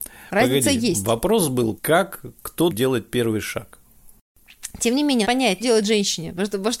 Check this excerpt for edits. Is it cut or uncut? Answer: cut